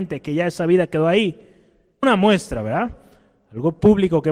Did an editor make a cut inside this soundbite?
yes; 1 cut; at 2.0 s

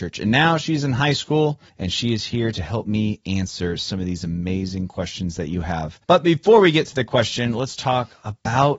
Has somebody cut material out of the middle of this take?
yes; 2 cuts; at 1.7 s, 6.0 s

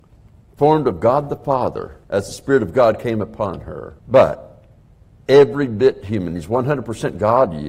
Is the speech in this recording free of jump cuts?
no; 2 cuts; at 2.0 s, 4.0 s

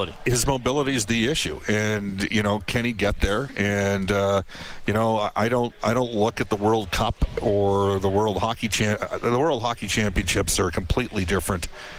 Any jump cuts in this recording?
no; 0 cuts

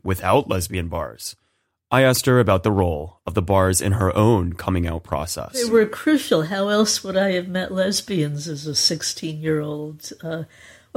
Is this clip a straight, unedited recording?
yes; 0 cuts

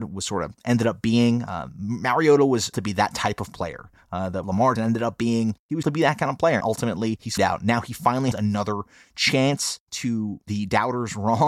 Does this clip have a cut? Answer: yes; 8 cuts; at 2.7 s, 4.4 s, 4.8 s, 5.8 s, 6.6 s, 7.4 s, 8.3 s, 10.5 s

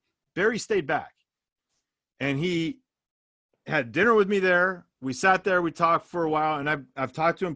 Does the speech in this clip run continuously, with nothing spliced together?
yes; 0 cuts

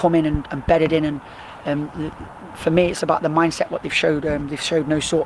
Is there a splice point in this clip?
no; 0 cuts

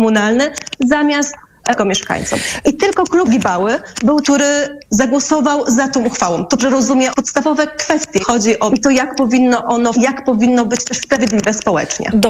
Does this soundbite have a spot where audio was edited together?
yes; 8 cuts; at 1.8 s, 3.2 s, 4.2 s, 6.6 s, 7.1 s, 8.2 s, 8.7 s, 9.9 s

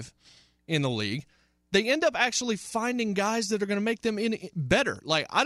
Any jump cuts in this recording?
no; 0 cuts

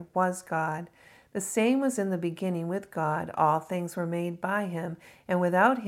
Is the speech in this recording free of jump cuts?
yes; 0 cuts

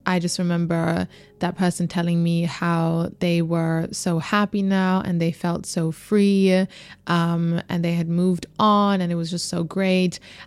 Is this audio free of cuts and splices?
yes; 0 cuts

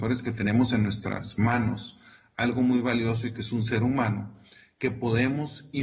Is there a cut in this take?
no; 0 cuts

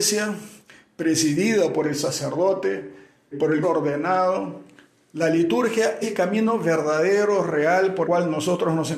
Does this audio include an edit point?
yes; 4 cuts; at 3.3 s, 3.6 s, 6.0 s, 8.0 s

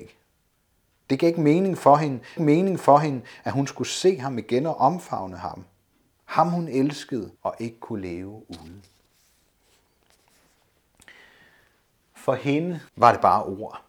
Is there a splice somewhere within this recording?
yes; 3 cuts; at 2.4 s, 7.4 s, 12.9 s

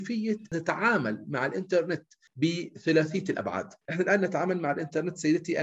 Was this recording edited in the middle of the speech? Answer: yes; 1 cut; at 3.8 s

